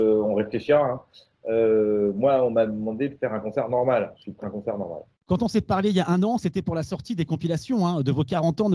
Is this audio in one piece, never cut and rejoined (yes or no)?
no